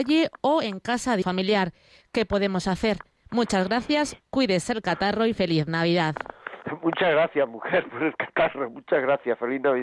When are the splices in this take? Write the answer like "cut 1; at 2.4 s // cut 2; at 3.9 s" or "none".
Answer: cut 1; at 1.2 s